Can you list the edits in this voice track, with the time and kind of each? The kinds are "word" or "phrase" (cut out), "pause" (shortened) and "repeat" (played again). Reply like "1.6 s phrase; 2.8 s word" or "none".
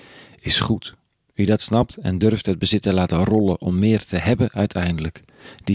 1.2 s pause